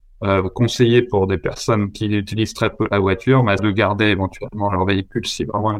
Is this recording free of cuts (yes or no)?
no